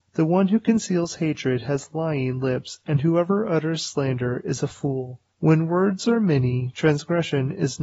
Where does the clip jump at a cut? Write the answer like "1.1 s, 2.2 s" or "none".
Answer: none